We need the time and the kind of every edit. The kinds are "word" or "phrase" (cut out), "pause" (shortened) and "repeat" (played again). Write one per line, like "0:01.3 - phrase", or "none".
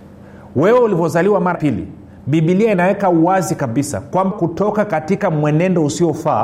0:01.5 - word
0:04.3 - word